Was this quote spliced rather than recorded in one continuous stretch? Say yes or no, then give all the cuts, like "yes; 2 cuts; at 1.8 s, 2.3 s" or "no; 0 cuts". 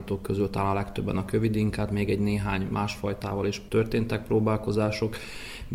no; 0 cuts